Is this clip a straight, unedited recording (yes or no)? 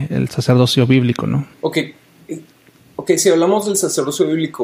no